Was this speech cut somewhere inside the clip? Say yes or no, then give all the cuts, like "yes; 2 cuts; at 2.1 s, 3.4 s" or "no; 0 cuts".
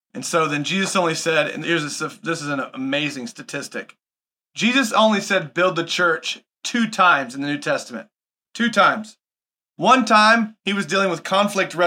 yes; 1 cut; at 1.6 s